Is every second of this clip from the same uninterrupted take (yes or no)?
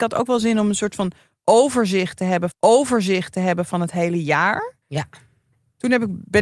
no